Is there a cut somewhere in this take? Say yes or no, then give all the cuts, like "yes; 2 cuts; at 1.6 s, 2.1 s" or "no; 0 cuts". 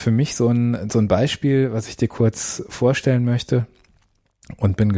no; 0 cuts